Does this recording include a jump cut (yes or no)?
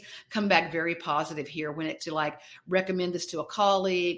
yes